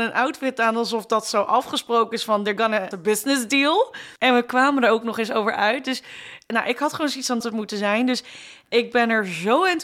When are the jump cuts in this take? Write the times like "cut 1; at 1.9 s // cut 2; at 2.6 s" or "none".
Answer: cut 1; at 2.9 s // cut 2; at 4.2 s // cut 3; at 7.4 s